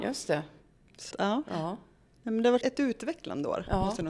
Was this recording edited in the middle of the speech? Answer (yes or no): yes